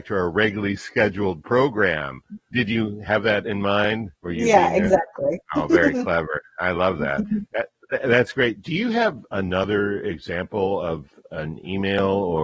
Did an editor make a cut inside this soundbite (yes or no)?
yes